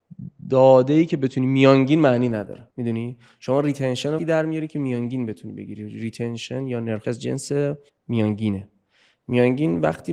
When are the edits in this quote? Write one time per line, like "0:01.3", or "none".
0:02.7
0:04.2
0:07.0
0:07.9